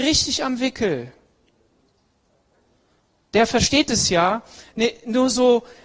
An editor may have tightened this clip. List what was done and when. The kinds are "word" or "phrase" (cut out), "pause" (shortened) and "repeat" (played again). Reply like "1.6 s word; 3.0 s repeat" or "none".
none